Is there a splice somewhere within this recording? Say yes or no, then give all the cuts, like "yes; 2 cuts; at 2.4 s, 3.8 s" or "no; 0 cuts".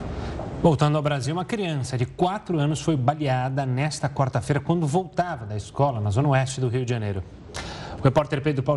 no; 0 cuts